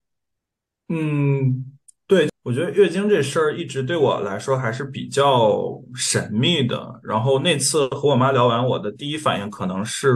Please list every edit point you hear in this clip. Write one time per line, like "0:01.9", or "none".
none